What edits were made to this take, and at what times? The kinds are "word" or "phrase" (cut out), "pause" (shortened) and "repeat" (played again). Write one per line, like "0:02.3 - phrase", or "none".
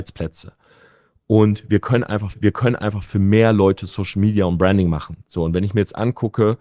0:02.3 - repeat
0:05.2 - pause